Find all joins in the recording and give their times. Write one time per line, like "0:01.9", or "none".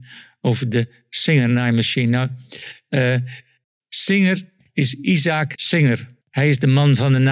0:03.6
0:05.5
0:06.2